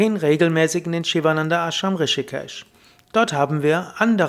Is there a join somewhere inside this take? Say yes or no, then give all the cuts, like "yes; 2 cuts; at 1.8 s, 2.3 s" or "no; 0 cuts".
no; 0 cuts